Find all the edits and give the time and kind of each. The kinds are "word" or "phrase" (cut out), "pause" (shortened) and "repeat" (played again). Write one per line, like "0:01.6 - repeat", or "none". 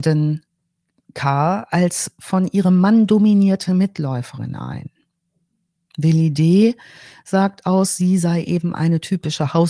none